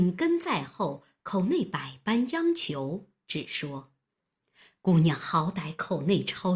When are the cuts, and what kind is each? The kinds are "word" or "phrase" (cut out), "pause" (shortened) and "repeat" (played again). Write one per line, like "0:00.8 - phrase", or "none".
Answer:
none